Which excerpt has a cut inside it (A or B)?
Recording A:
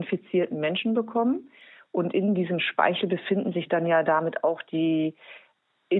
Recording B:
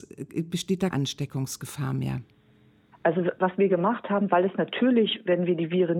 B